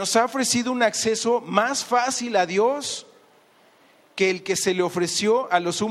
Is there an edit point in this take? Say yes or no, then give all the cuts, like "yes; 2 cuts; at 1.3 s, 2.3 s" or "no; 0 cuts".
no; 0 cuts